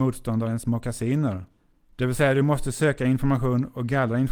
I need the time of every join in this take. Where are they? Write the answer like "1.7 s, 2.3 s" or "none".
1.6 s